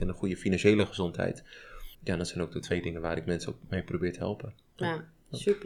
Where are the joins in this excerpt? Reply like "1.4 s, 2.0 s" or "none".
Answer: 1.9 s